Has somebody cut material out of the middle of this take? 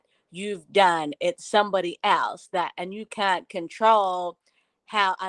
no; 0 cuts

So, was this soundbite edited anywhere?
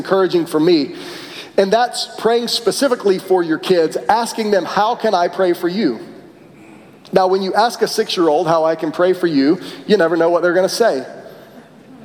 no; 0 cuts

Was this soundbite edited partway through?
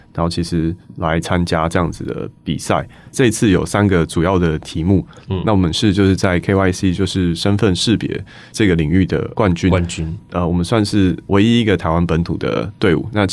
no; 0 cuts

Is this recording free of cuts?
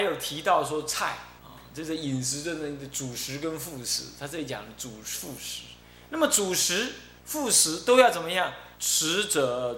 no; 4 cuts; at 1.4 s, 5.8 s, 7.2 s, 8.8 s

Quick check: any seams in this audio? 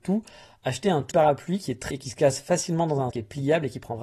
yes; 3 cuts; at 1.1 s, 1.9 s, 3.1 s

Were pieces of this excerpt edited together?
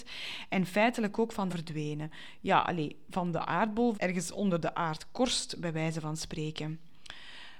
yes; 2 cuts; at 1.5 s, 3.9 s

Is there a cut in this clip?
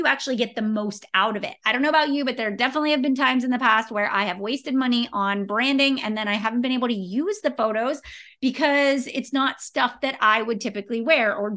no; 0 cuts

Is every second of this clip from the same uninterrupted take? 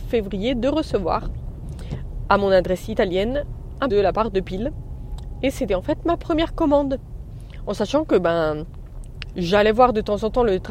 no; 2 cuts; at 3.9 s, 9.3 s

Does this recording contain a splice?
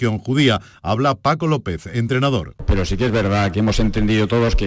yes; 1 cut; at 3.5 s

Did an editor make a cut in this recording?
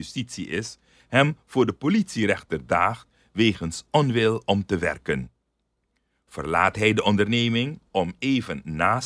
no; 0 cuts

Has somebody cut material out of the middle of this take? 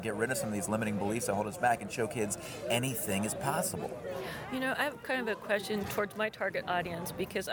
no; 0 cuts

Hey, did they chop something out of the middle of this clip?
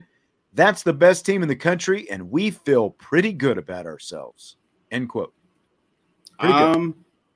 no; 0 cuts

